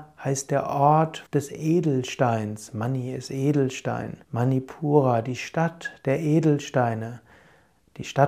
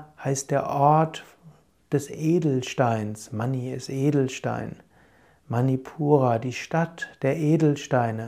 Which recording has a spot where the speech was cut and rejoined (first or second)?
first